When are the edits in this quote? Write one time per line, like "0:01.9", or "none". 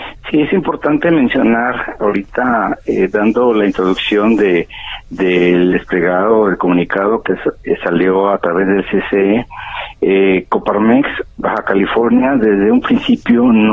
0:11.3